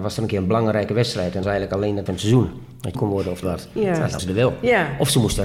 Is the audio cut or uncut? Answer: cut